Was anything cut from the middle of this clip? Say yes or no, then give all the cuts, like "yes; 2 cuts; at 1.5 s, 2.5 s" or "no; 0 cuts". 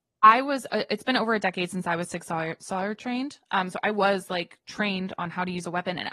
no; 0 cuts